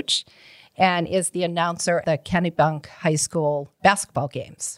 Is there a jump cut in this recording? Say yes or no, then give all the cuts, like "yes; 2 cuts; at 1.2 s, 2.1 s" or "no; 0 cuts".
yes; 2 cuts; at 2.0 s, 3.8 s